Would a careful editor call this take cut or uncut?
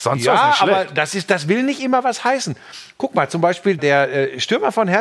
cut